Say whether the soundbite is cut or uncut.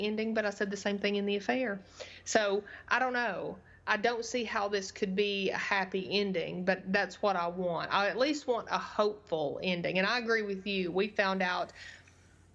uncut